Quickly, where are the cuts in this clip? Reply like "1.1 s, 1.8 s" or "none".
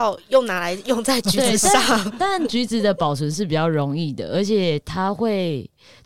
none